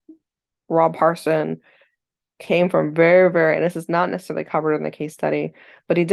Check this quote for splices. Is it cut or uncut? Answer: uncut